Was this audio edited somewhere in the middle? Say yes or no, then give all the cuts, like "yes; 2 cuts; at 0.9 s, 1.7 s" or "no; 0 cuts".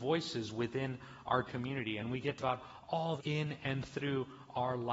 yes; 3 cuts; at 1.5 s, 2.4 s, 3.2 s